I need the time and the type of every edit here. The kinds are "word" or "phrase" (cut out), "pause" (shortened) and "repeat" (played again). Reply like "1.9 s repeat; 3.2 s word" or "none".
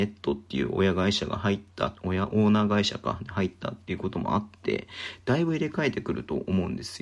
none